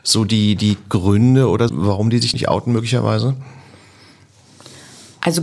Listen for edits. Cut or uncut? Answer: cut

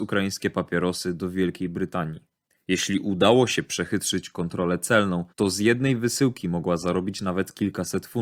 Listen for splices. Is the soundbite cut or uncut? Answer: cut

